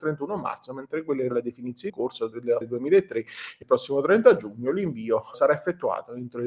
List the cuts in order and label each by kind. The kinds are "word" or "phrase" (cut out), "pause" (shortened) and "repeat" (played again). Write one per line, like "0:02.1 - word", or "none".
0:01.3 - word
0:01.9 - word
0:02.6 - word
0:03.6 - word
0:05.3 - word